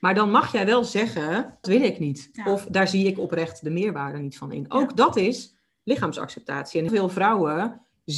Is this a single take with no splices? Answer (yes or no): no